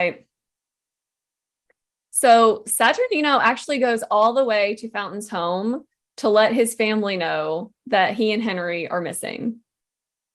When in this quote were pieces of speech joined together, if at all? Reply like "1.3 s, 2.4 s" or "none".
none